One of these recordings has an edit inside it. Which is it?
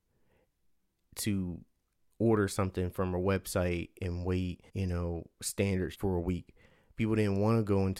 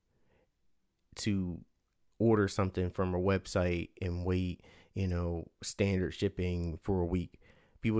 first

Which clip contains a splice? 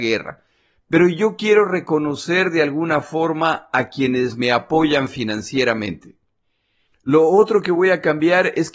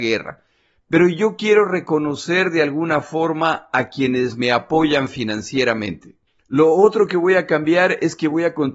second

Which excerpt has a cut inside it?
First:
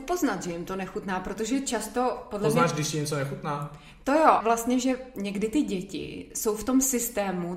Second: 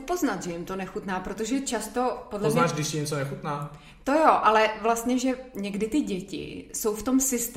first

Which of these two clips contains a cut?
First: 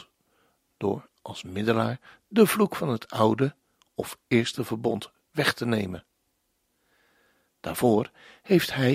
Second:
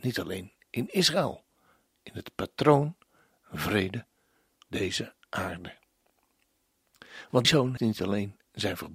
second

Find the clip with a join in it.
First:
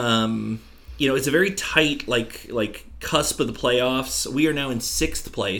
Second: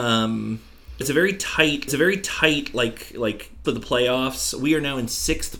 second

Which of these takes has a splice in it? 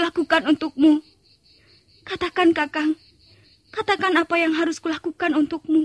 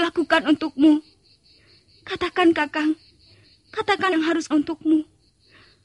second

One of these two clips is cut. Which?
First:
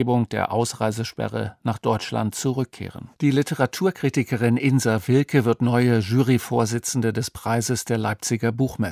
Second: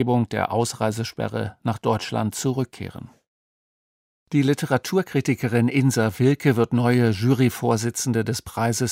first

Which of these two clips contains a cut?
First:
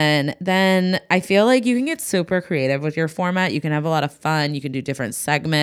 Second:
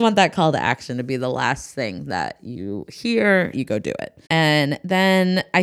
second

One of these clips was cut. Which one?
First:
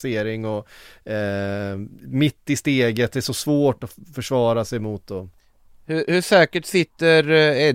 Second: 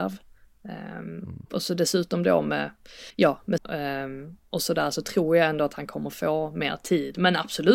second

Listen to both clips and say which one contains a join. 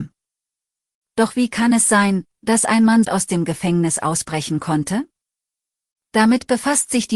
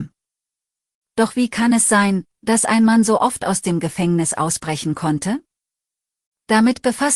first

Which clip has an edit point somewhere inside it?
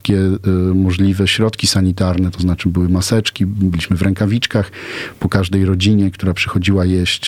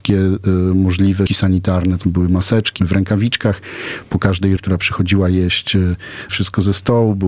second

